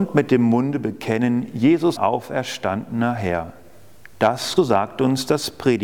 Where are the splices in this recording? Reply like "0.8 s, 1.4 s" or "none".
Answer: 2.0 s, 4.6 s